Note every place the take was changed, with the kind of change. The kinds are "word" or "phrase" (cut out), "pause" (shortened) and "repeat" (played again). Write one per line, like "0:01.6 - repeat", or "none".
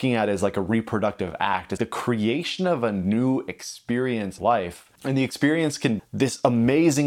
0:01.8 - word
0:04.4 - word
0:05.0 - pause
0:06.0 - word